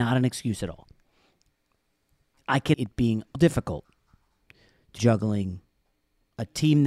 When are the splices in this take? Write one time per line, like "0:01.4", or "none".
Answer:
0:02.7
0:03.4
0:05.0